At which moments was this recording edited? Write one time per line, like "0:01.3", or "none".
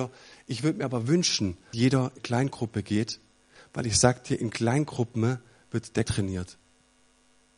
0:01.7
0:02.2
0:06.0